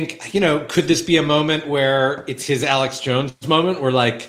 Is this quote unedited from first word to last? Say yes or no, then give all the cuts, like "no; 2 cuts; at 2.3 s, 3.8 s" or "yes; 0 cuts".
yes; 0 cuts